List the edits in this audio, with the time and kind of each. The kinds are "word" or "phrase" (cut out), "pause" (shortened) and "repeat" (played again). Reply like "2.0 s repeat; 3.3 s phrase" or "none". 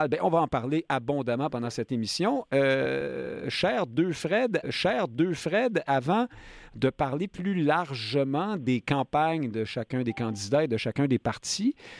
4.6 s repeat